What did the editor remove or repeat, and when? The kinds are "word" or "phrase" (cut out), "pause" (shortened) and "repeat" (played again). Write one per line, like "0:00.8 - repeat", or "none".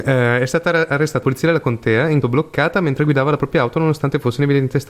0:01.2 - word
0:02.2 - word